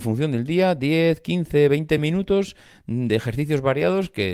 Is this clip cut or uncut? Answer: uncut